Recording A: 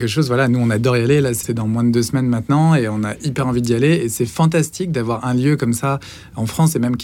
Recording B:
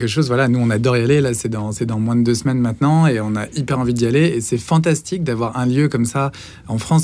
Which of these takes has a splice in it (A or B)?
A